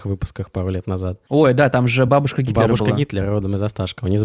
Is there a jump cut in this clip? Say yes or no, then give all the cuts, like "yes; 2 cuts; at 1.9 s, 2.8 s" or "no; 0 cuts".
no; 0 cuts